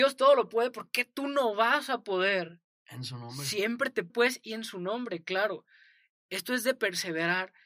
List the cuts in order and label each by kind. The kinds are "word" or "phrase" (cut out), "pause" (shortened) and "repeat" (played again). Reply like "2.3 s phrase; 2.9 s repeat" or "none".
4.1 s word